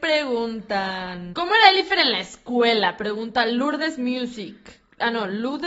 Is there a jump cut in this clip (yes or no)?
no